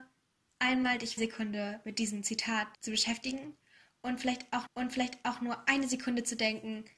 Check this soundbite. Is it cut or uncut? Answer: cut